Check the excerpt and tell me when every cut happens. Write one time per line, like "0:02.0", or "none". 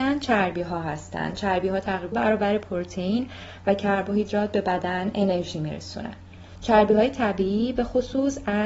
0:02.1